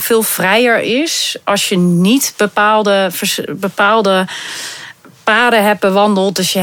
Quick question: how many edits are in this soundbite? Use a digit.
0